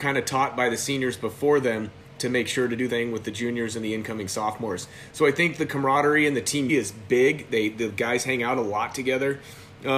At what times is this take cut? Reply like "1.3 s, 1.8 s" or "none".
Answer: 2.9 s, 6.7 s